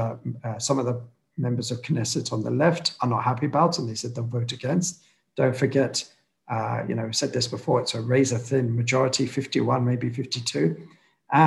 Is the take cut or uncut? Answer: uncut